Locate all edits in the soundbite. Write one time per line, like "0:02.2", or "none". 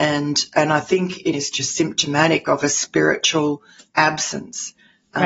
0:01.3
0:03.8